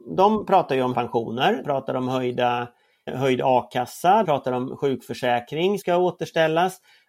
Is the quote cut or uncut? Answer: cut